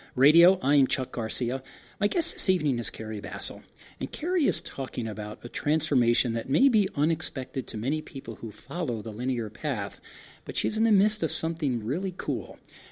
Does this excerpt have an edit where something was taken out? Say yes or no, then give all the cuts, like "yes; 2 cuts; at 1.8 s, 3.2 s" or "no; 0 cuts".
no; 0 cuts